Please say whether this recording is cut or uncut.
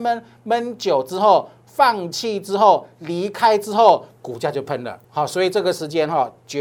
cut